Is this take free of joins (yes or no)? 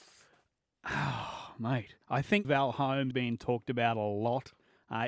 no